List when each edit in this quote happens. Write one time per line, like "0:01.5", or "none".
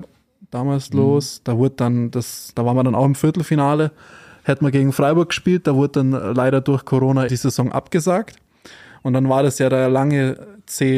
0:07.3